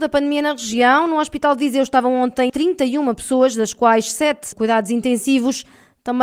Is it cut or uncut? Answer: cut